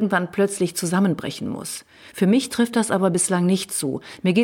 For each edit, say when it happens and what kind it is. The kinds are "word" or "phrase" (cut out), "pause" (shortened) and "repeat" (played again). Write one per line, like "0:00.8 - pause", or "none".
none